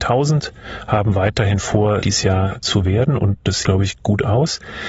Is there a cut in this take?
yes; 2 cuts; at 2.0 s, 3.6 s

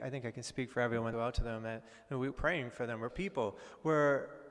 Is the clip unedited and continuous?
no; 3 cuts; at 1.1 s, 2.3 s, 3.1 s

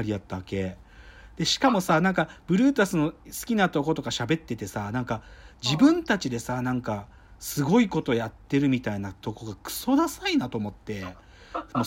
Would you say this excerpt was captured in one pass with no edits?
yes; 0 cuts

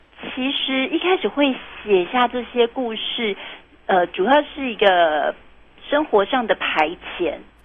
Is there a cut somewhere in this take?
no; 0 cuts

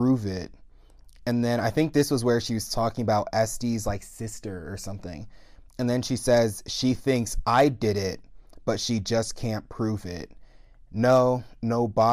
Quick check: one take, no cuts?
no; 1 cut; at 5.7 s

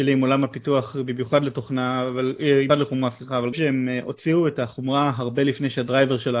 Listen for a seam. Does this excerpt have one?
yes; 2 cuts; at 2.7 s, 3.5 s

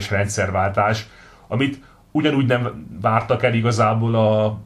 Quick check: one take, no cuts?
yes; 0 cuts

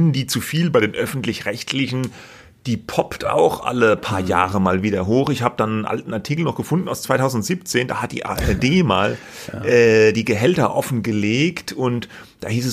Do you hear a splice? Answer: no; 0 cuts

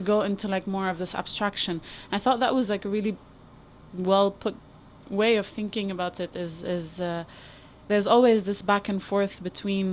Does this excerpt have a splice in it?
no; 0 cuts

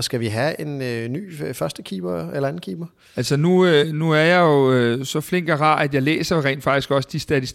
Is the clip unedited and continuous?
yes; 0 cuts

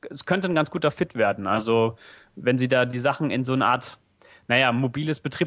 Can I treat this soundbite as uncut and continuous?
yes; 0 cuts

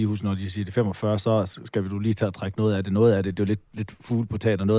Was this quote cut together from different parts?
no; 0 cuts

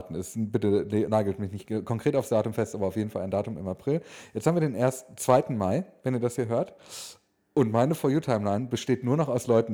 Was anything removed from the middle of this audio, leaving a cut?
no; 0 cuts

